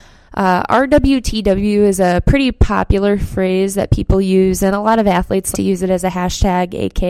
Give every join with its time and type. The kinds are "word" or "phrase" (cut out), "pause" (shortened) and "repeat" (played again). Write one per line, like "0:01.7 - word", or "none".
0:05.5 - word

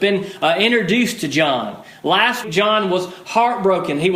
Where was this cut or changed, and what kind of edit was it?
0:02.4 - word

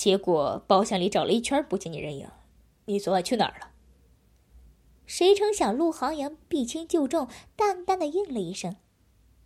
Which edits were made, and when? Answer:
none

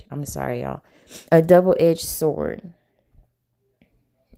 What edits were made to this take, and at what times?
0:01.3 - pause

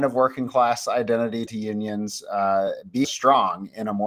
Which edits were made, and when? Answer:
0:01.5 - word
0:03.0 - word

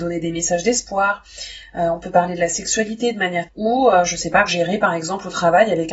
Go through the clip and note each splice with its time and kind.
0:03.5 - phrase
0:04.5 - word

